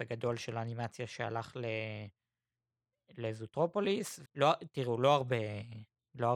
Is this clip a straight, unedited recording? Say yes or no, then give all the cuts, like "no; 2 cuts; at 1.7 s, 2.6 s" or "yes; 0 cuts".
no; 1 cut; at 4.3 s